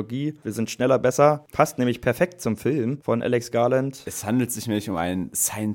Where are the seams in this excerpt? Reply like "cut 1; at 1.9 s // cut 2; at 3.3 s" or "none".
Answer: none